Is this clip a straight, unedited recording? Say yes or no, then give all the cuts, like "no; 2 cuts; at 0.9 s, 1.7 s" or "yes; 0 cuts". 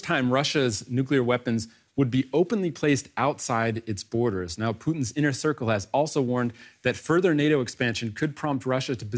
yes; 0 cuts